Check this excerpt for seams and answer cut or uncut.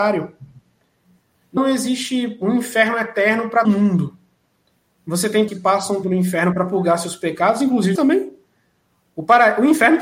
cut